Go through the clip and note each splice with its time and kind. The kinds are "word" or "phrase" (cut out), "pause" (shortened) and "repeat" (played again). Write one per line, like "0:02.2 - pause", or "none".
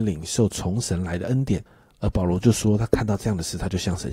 0:01.7 - pause